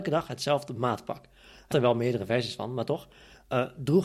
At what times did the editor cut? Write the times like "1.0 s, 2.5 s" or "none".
1.7 s